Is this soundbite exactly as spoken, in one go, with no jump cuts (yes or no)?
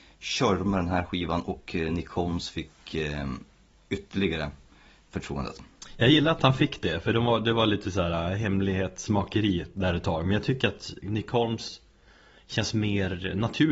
yes